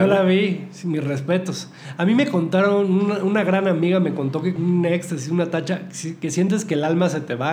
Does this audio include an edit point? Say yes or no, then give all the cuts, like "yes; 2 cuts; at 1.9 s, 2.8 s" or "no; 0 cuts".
yes; 1 cut; at 4.6 s